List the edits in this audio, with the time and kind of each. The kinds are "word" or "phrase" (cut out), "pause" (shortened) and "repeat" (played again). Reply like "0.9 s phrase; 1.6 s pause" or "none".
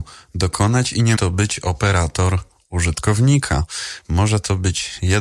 1.2 s word